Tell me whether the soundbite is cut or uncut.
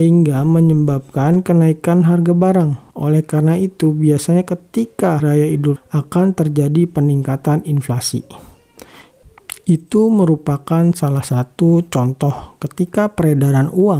cut